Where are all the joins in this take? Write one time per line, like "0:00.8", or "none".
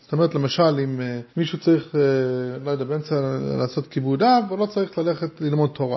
0:01.3